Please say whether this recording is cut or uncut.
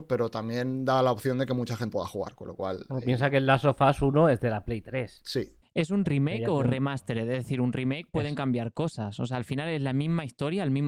cut